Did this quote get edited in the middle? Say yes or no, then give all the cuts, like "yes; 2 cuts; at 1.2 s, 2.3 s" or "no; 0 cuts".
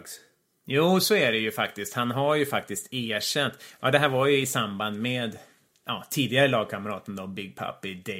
no; 0 cuts